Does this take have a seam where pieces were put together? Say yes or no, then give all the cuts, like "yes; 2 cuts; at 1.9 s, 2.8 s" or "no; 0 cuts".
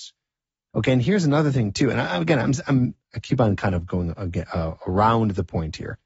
yes; 1 cut; at 3.0 s